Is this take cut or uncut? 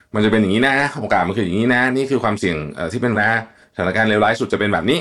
cut